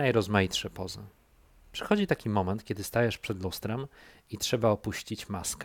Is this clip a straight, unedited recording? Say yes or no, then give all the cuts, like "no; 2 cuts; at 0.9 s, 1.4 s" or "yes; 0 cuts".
yes; 0 cuts